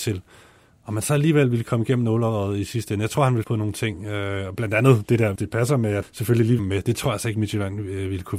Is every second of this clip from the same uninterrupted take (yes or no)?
no